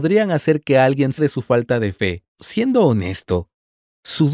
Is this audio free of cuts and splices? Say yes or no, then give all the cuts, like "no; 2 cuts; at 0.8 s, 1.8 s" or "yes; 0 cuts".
no; 2 cuts; at 1.2 s, 2.3 s